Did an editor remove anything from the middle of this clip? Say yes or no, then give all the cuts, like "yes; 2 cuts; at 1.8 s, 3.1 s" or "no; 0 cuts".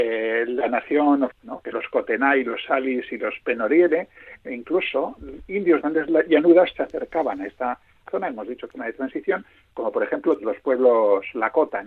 yes; 8 cuts; at 1.3 s, 1.7 s, 4.5 s, 5.8 s, 6.7 s, 8.1 s, 8.7 s, 10.4 s